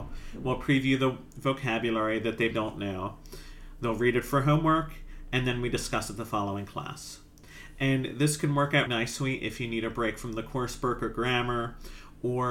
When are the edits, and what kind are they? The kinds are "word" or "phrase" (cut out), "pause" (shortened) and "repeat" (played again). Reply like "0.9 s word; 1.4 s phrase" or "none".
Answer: 2.5 s word; 8.9 s word